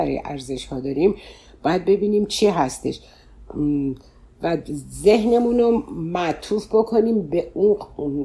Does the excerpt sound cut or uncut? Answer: uncut